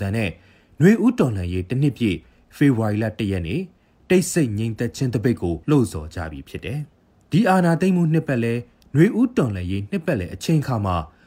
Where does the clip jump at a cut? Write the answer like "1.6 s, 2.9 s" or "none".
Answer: 5.6 s, 6.9 s

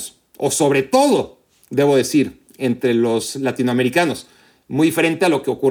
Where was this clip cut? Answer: none

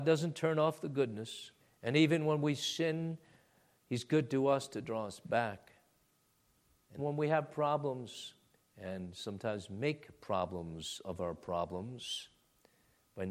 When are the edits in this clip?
1.6 s, 7.0 s, 8.5 s

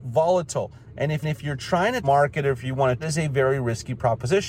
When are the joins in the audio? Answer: 1.2 s, 2.0 s, 3.0 s

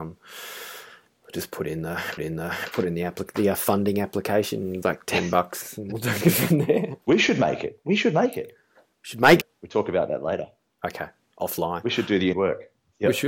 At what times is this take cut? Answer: 2.2 s, 4.8 s, 7.0 s, 9.4 s, 12.3 s

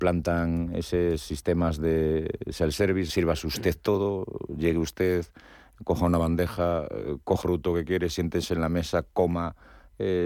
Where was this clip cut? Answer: 3.1 s, 7.4 s

